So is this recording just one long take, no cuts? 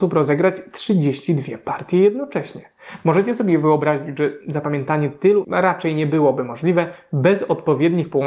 no; 1 cut; at 5.4 s

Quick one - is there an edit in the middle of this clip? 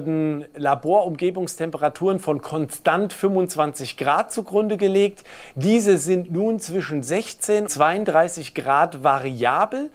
yes; 1 cut; at 7.7 s

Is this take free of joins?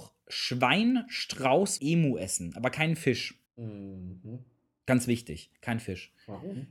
no; 2 cuts; at 1.8 s, 3.5 s

